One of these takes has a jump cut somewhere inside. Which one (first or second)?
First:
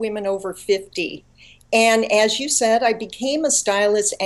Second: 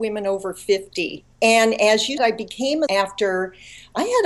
second